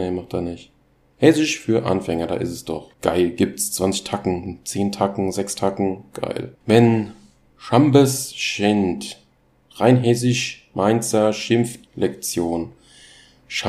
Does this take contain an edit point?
yes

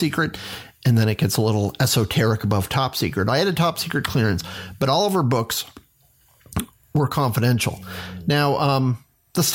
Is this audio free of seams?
yes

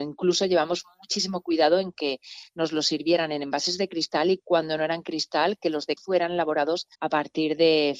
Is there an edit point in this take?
yes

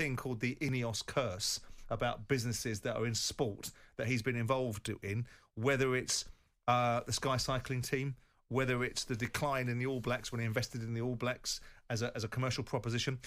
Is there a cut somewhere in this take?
no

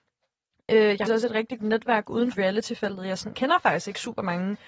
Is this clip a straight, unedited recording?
no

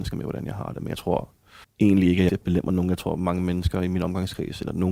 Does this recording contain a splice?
yes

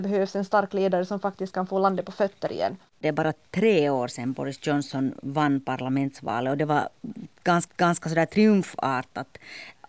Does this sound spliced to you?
yes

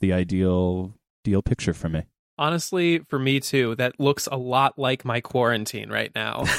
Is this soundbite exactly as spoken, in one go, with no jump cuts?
yes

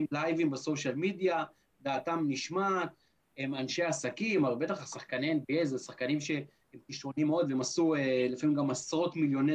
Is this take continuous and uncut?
yes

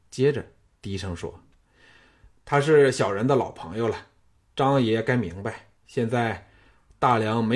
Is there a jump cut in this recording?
yes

